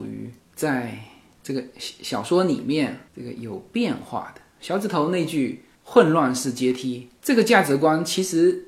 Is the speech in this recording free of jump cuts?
no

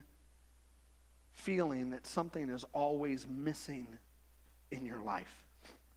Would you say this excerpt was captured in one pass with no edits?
yes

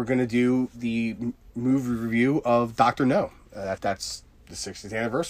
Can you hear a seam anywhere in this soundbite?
yes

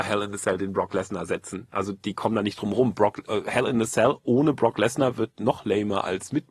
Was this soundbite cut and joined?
no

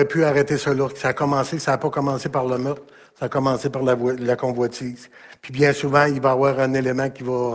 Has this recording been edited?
no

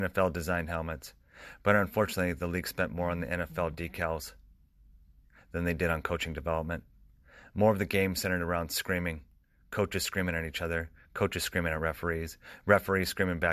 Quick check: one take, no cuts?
yes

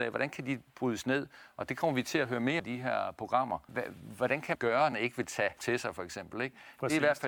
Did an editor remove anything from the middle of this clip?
yes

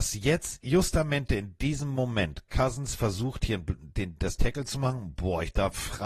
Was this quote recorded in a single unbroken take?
no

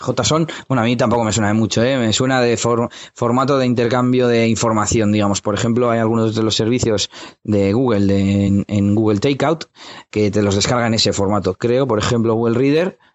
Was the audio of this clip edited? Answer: no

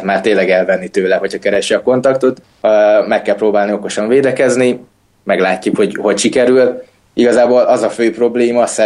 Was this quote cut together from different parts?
no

